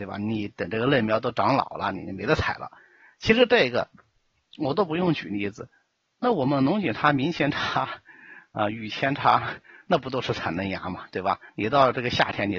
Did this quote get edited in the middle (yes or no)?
no